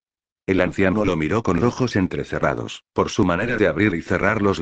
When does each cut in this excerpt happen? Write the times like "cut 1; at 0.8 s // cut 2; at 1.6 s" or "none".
cut 1; at 1.6 s // cut 2; at 2.9 s